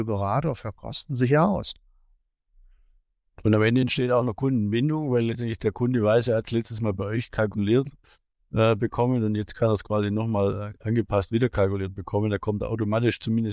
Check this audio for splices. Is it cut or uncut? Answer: uncut